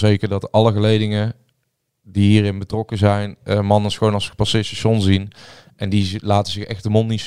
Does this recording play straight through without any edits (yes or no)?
yes